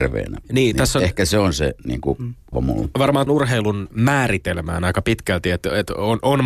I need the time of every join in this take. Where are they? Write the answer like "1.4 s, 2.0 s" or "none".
2.5 s, 3.3 s, 3.9 s